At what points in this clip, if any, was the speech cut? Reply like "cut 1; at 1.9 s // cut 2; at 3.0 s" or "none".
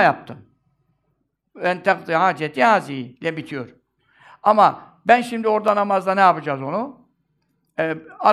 none